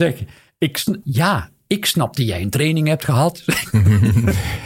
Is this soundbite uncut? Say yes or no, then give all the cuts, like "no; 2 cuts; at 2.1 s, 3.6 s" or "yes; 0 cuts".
no; 1 cut; at 1.0 s